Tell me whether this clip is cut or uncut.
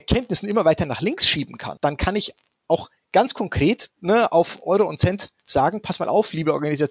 uncut